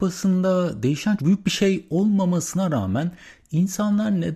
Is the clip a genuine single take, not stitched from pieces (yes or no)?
no